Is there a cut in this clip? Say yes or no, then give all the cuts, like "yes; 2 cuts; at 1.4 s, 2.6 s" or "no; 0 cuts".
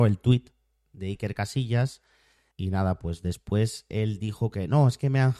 yes; 1 cut; at 2.5 s